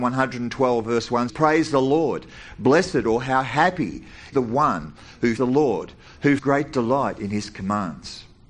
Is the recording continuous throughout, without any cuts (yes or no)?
no